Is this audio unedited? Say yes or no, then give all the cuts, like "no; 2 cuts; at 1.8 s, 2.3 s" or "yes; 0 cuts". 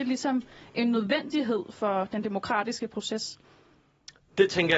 yes; 0 cuts